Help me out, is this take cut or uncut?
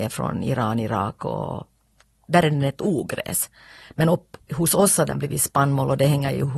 uncut